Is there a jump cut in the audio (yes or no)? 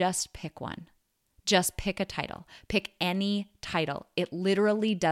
no